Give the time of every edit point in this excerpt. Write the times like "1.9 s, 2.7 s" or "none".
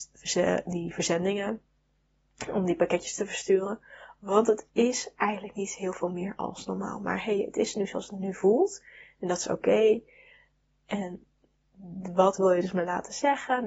none